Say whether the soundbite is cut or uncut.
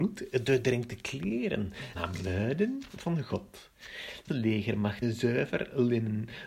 cut